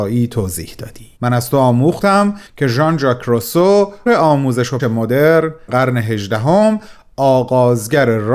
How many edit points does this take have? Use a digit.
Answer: 5